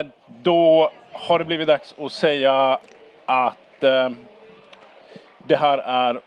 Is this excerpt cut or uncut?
uncut